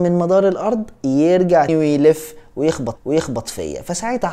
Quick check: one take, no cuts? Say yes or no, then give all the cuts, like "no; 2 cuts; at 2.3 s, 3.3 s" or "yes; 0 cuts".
no; 2 cuts; at 1.7 s, 3.0 s